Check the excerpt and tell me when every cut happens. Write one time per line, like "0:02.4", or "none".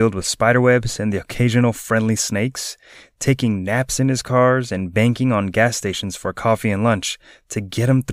none